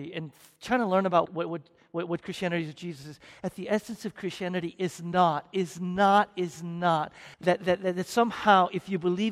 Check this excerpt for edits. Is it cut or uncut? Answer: cut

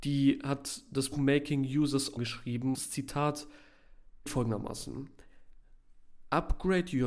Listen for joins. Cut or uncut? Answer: cut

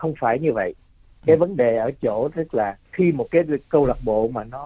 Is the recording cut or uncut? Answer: cut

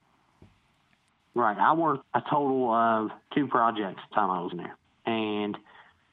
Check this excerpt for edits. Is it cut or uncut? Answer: cut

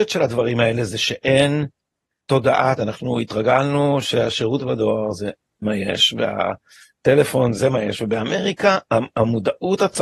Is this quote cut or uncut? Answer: cut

